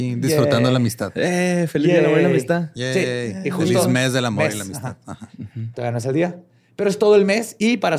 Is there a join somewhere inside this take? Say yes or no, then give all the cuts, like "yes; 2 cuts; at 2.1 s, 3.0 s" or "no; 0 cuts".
no; 0 cuts